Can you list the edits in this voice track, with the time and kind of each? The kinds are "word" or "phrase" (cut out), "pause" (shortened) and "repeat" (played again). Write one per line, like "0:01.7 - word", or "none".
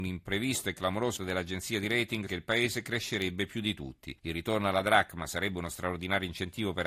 0:01.2 - word
0:02.3 - word
0:04.2 - pause